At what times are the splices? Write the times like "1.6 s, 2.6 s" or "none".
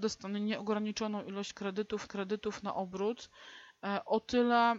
2.1 s